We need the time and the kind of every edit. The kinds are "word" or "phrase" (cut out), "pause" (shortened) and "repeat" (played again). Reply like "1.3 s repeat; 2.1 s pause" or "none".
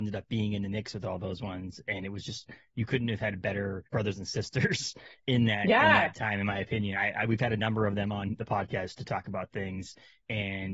3.9 s pause